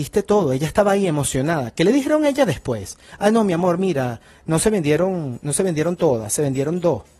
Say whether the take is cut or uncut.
uncut